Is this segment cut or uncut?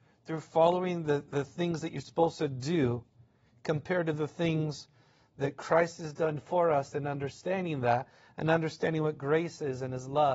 uncut